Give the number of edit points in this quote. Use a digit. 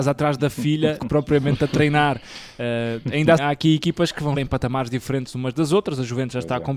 3